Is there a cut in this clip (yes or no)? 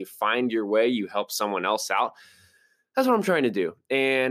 no